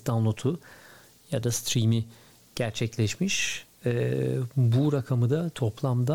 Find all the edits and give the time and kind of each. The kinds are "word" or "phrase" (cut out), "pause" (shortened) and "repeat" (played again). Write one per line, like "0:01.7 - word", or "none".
none